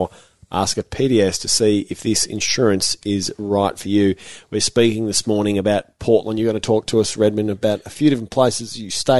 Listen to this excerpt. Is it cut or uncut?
uncut